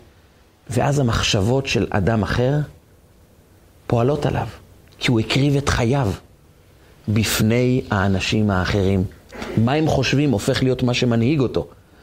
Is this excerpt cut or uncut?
uncut